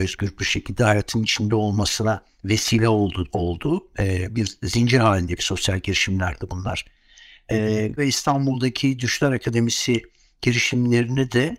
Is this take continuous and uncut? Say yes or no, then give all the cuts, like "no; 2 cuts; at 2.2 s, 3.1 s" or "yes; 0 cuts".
no; 1 cut; at 8.0 s